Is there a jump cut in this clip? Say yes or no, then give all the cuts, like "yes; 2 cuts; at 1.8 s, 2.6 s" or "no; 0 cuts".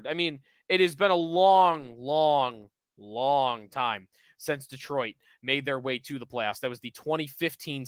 no; 0 cuts